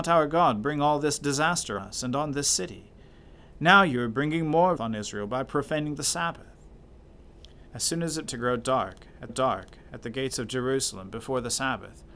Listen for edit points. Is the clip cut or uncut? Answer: cut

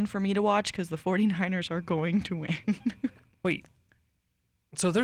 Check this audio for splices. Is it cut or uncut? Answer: uncut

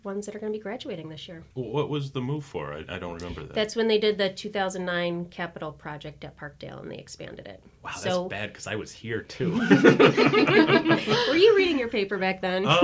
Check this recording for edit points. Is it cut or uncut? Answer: cut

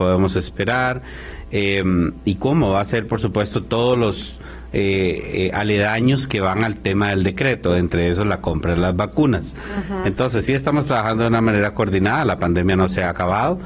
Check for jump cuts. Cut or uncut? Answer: uncut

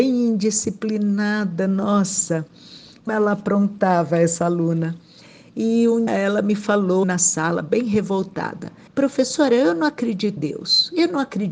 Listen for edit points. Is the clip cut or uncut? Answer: cut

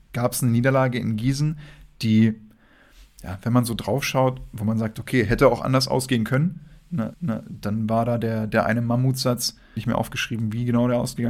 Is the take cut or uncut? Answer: cut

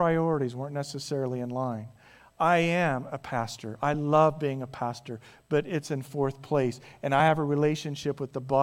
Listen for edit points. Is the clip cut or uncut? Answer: uncut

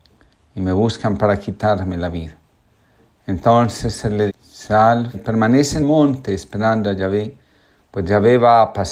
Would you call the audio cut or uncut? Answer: cut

